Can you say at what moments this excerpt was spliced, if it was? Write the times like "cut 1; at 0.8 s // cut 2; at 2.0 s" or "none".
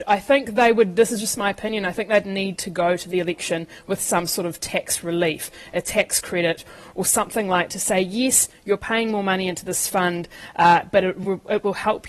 cut 1; at 7.7 s